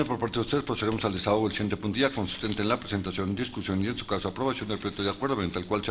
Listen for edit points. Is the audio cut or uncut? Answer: cut